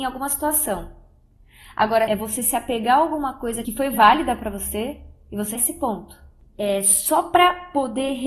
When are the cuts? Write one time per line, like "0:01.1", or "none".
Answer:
0:02.1
0:03.7
0:05.6

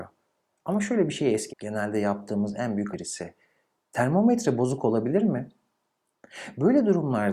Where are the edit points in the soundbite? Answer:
0:01.5
0:02.9

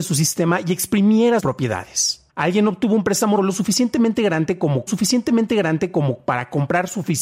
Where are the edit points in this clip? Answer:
0:01.4
0:02.3
0:03.4
0:04.9

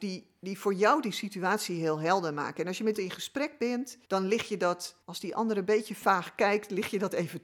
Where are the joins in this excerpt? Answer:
0:02.9
0:04.0
0:05.0

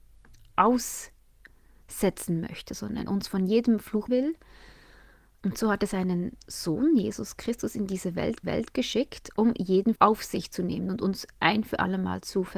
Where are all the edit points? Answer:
0:03.1
0:04.1
0:08.4
0:10.0

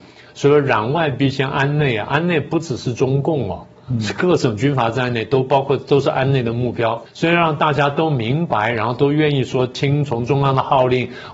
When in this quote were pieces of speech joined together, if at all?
0:07.1

